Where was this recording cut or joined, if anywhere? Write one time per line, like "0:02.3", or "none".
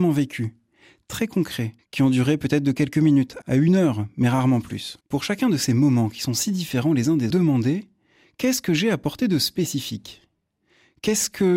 0:01.8
0:05.0
0:07.3